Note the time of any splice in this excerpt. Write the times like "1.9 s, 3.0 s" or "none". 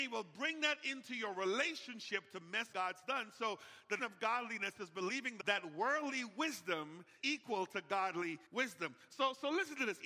2.7 s, 4.0 s, 5.4 s, 7.2 s, 8.5 s

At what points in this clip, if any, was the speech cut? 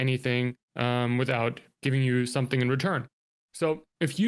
none

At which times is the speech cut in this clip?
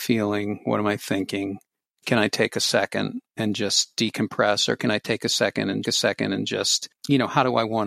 3.3 s, 5.8 s

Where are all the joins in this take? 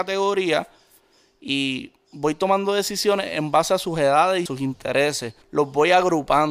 4.5 s, 5.4 s

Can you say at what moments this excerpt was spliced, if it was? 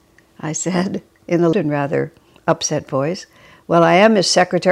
1.5 s

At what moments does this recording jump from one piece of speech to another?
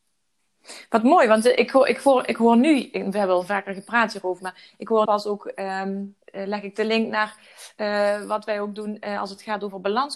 4.4 s, 5.0 s, 6.2 s

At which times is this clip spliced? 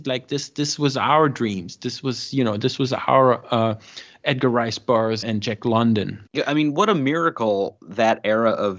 5.2 s, 6.3 s

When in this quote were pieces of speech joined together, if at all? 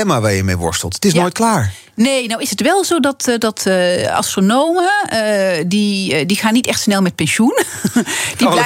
none

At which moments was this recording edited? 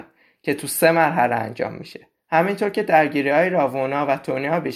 2.2 s

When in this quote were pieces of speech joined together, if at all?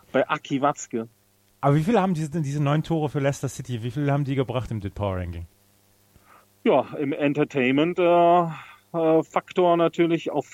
none

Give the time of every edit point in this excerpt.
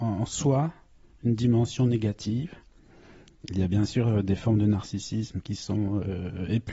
none

